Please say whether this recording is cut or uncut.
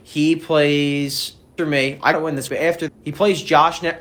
cut